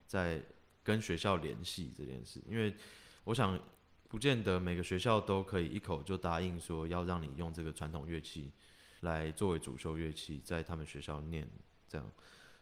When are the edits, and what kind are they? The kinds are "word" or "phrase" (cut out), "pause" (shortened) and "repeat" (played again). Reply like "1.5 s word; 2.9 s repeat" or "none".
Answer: 3.2 s pause; 9.0 s pause